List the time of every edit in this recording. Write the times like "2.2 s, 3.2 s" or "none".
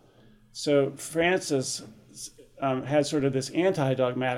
none